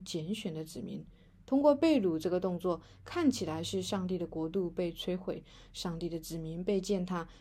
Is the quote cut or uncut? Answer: uncut